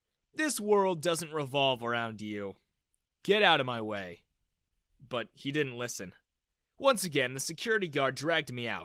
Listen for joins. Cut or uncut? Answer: uncut